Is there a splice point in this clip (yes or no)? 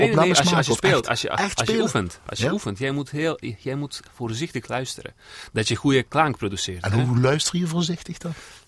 no